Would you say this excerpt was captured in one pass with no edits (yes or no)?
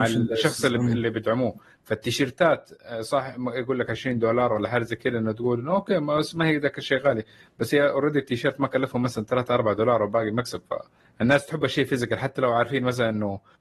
yes